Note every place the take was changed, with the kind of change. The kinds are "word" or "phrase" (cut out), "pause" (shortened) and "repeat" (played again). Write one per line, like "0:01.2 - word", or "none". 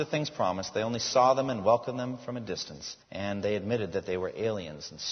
0:03.0 - pause

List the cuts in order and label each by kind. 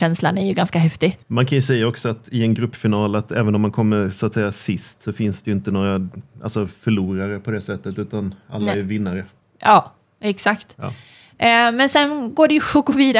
0:01.2 - pause

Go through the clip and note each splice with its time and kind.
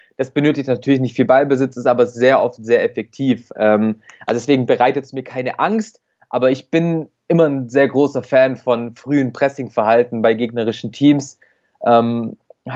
none

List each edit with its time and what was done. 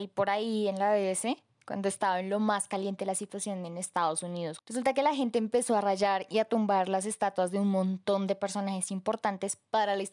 none

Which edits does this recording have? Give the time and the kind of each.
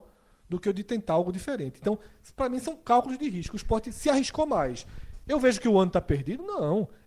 none

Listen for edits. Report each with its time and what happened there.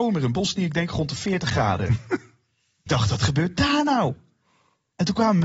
0:02.9 - word

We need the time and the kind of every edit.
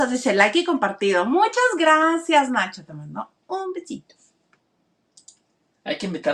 none

